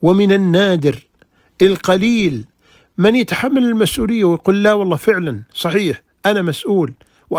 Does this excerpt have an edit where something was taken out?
no; 0 cuts

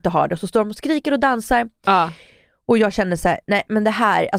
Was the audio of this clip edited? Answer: no; 0 cuts

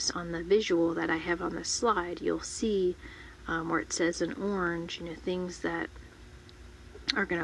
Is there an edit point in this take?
no; 0 cuts

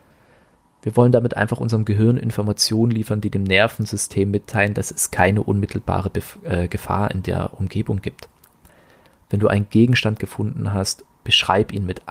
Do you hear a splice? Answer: no; 0 cuts

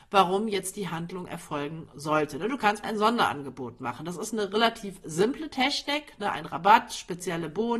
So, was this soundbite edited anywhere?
yes; 1 cut; at 2.8 s

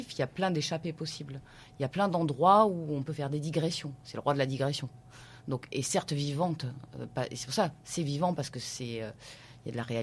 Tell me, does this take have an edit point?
no; 0 cuts

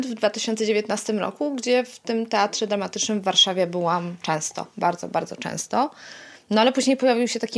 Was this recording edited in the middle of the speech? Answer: no; 0 cuts

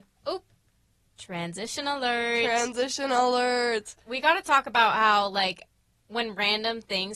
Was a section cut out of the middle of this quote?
no; 0 cuts

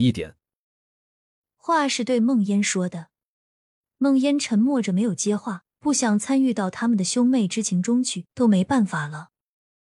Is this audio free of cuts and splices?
no; 2 cuts; at 5.7 s, 8.3 s

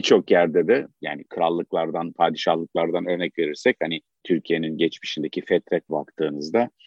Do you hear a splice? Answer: yes; 2 cuts; at 4.2 s, 5.9 s

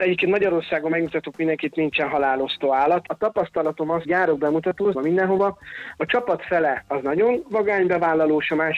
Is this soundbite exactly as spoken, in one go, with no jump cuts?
no; 2 cuts; at 4.0 s, 4.9 s

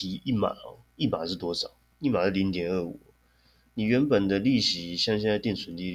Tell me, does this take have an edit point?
no; 0 cuts

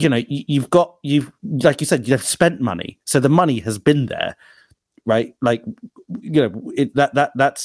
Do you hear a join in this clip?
no; 0 cuts

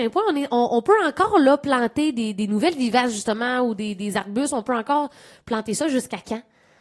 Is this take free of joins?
yes; 0 cuts

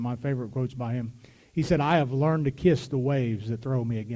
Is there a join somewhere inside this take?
no; 0 cuts

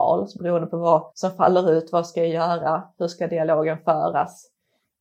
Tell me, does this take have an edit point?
yes; 1 cut; at 1.1 s

